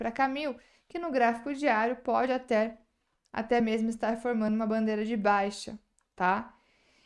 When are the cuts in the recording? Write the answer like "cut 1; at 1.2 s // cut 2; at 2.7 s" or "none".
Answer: none